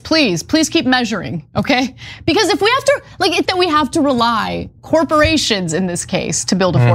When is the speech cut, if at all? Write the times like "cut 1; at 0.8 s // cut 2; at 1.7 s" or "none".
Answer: cut 1; at 3.4 s // cut 2; at 4.8 s